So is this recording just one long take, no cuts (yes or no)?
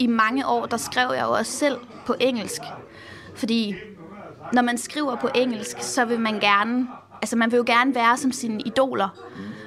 yes